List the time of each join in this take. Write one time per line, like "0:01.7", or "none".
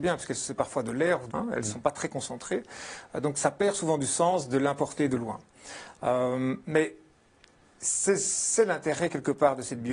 0:01.3